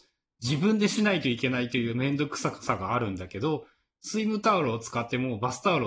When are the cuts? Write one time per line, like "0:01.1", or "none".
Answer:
none